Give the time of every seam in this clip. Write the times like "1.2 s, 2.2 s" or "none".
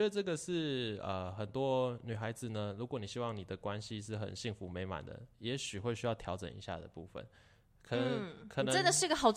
5.3 s